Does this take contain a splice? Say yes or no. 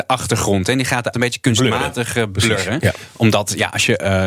yes